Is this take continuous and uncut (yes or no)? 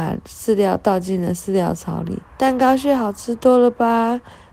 no